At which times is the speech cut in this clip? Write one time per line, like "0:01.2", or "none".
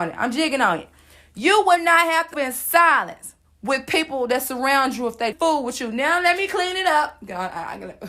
0:02.3
0:03.4
0:05.3